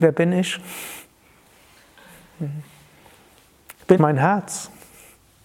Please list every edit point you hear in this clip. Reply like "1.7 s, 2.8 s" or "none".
4.0 s